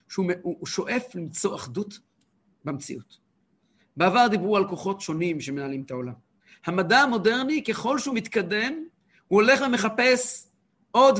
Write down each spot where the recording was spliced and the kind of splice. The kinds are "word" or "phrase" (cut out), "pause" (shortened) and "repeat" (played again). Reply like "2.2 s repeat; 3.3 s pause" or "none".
none